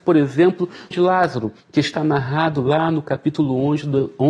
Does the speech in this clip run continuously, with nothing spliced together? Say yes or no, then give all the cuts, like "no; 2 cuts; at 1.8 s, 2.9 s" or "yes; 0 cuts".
no; 2 cuts; at 0.9 s, 1.6 s